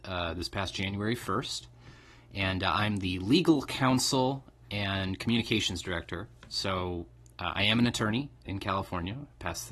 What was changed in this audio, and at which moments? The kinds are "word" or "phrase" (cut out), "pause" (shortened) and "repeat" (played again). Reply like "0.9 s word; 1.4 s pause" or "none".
8.5 s word